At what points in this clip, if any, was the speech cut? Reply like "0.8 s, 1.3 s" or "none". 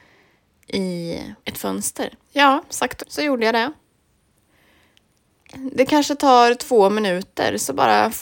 1.4 s, 2.2 s, 3.0 s